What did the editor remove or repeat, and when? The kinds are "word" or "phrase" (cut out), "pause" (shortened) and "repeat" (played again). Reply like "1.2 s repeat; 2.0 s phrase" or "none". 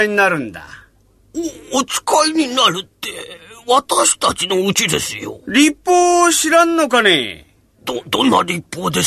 none